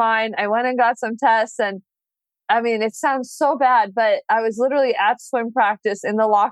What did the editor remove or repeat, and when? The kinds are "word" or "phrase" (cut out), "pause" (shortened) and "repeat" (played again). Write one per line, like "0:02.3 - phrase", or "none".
none